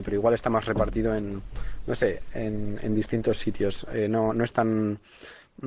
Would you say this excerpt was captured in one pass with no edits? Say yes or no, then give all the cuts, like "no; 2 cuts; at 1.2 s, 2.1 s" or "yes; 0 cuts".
yes; 0 cuts